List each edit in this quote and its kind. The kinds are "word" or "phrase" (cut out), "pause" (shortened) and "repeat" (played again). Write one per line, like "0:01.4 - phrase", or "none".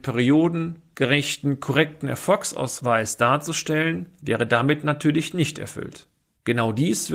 none